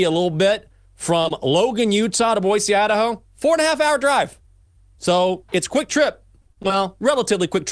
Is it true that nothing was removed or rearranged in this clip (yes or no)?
yes